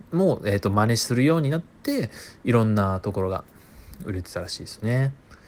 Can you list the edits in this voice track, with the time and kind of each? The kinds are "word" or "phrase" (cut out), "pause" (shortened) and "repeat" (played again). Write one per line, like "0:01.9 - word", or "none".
none